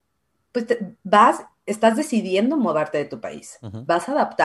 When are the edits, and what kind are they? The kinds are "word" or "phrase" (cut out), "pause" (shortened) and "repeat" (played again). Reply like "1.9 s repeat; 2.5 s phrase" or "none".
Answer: none